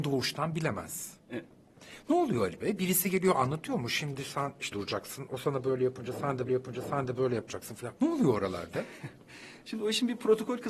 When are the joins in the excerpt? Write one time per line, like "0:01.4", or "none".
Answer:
0:01.2
0:04.7
0:06.5
0:08.0